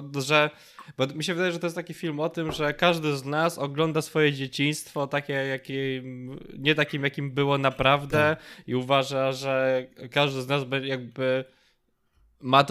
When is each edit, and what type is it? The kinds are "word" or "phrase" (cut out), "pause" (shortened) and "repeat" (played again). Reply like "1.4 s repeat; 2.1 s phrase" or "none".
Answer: none